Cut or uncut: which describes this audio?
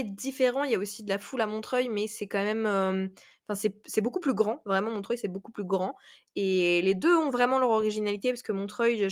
uncut